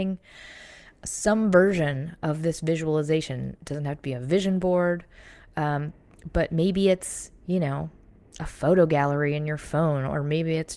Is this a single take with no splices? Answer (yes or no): yes